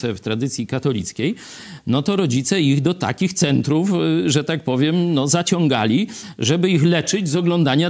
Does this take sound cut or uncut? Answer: uncut